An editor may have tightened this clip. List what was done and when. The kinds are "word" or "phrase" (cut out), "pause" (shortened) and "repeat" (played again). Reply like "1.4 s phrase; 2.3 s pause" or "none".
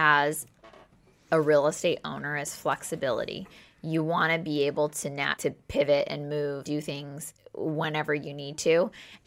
5.4 s word; 6.7 s word